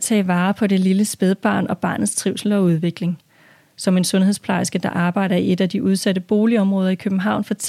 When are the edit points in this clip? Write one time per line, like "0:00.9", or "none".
none